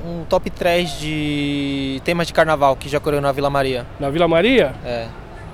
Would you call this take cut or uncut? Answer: uncut